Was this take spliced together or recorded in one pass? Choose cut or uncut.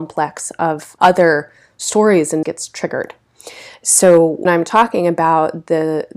cut